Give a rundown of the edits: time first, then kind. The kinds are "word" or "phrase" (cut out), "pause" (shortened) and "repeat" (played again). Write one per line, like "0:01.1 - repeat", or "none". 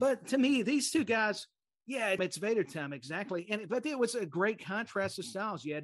0:02.2 - word